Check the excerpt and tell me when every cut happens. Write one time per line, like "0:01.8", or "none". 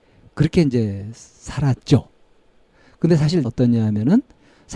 0:03.4